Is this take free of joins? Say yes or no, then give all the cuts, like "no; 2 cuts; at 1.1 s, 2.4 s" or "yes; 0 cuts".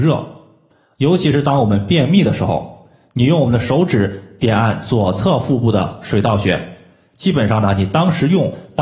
yes; 0 cuts